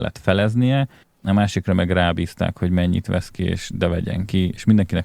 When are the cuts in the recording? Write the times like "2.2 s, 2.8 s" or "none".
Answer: 1.0 s

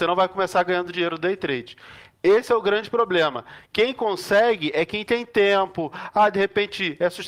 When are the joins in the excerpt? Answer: 3.6 s

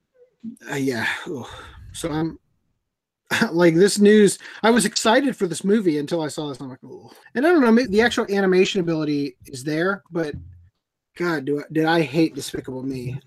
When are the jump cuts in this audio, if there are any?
7.2 s, 7.9 s

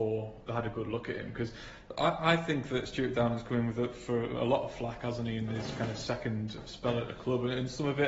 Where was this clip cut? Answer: none

